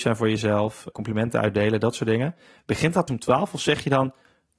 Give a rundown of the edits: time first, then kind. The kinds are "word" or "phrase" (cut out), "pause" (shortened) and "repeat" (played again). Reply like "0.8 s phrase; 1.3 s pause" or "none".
0.9 s word; 3.1 s word